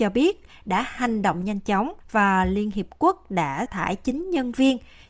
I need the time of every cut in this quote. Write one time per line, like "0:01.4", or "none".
0:02.0
0:03.7

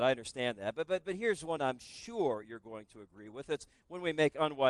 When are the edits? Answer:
none

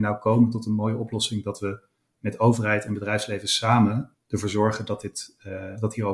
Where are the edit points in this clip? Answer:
none

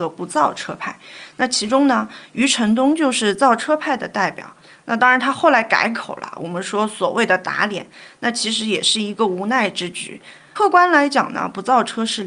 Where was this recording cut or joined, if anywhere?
none

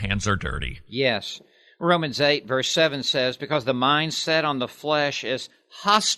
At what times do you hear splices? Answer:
none

